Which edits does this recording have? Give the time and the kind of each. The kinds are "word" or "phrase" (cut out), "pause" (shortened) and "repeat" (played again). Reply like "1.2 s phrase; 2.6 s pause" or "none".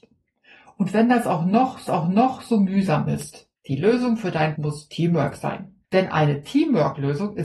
1.9 s repeat; 3.6 s pause; 4.5 s word; 5.8 s pause